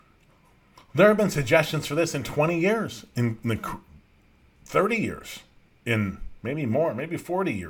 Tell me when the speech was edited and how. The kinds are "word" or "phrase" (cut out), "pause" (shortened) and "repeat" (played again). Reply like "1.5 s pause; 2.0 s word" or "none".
none